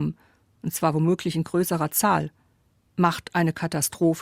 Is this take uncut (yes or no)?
yes